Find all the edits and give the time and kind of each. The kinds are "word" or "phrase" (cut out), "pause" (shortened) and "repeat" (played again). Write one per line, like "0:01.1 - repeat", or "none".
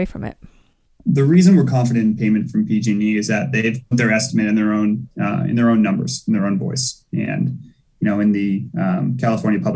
0:03.9 - word